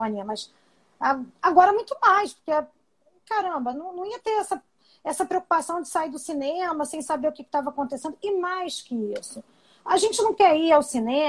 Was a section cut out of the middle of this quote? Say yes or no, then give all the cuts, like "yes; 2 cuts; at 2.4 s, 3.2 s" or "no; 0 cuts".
no; 0 cuts